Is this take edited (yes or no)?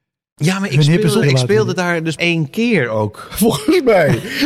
yes